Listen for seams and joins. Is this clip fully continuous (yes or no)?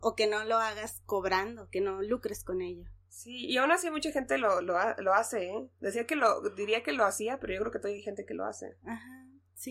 yes